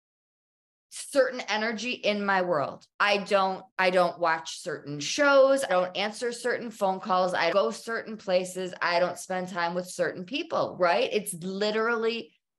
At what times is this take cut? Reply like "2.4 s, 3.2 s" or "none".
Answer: 2.9 s, 3.7 s, 5.7 s, 7.5 s